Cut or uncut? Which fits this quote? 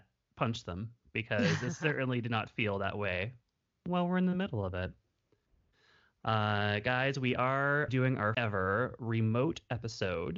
cut